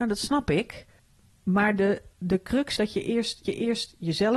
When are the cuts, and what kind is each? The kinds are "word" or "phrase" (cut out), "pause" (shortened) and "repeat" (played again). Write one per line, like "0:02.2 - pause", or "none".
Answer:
0:01.0 - pause
0:02.1 - pause
0:02.8 - word
0:03.4 - repeat